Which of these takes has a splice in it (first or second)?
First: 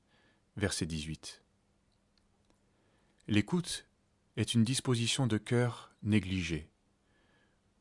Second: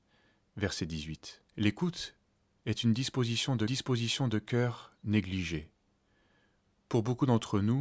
second